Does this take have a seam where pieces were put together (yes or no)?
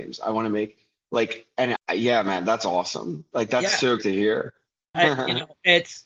yes